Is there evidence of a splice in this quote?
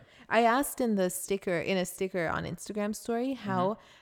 no; 0 cuts

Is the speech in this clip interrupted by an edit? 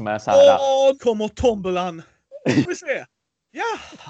yes; 2 cuts; at 1.0 s, 2.6 s

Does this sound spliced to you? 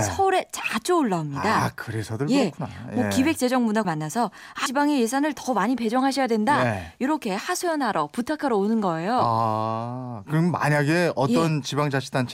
yes; 2 cuts; at 3.8 s, 4.7 s

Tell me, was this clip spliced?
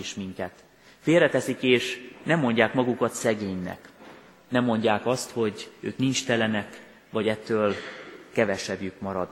no; 0 cuts

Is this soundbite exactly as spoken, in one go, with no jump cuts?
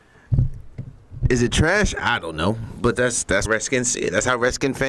no; 2 cuts; at 2.9 s, 3.4 s

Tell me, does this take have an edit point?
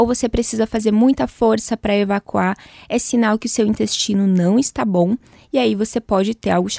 no; 0 cuts

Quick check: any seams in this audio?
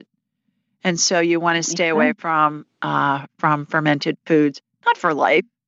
no; 0 cuts

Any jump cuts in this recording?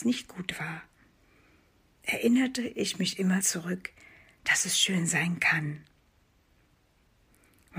yes; 1 cut; at 3.4 s

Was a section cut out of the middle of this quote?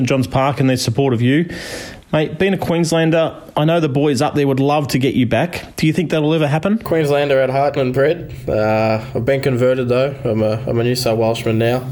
yes; 1 cut; at 7.8 s

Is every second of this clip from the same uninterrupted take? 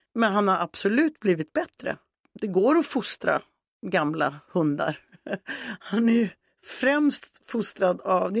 yes; 0 cuts

